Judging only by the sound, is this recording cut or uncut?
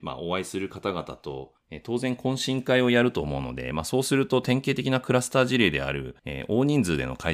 cut